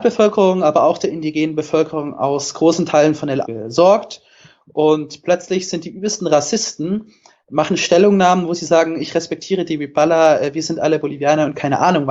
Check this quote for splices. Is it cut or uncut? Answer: cut